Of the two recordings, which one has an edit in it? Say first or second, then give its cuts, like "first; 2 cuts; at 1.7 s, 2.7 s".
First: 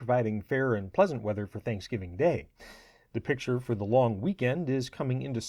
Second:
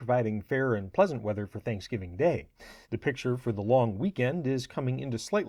second; 1 cut; at 2.8 s